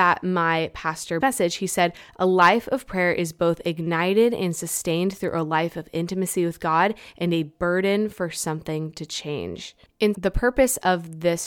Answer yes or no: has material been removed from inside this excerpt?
yes